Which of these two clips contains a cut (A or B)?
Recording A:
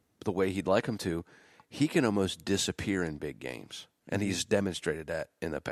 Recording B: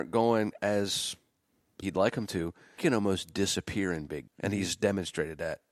B